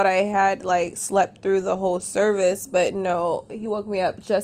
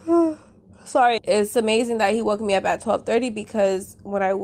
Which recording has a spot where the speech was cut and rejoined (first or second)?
second